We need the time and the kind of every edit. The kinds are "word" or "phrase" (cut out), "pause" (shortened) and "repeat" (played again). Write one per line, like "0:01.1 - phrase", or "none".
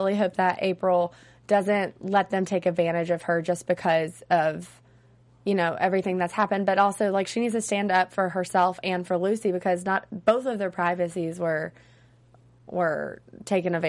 none